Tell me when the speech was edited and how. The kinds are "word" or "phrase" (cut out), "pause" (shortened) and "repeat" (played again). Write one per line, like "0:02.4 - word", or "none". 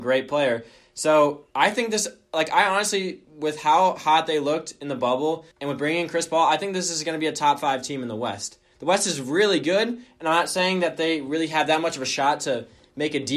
0:01.5 - pause
0:05.5 - pause